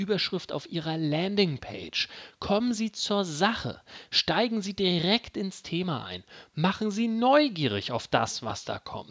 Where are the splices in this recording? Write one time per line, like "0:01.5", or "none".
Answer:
none